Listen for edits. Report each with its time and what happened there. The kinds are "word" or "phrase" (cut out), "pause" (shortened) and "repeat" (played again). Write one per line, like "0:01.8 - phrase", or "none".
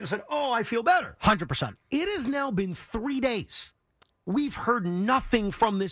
0:01.8 - pause